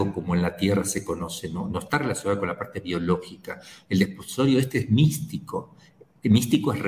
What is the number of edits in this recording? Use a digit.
0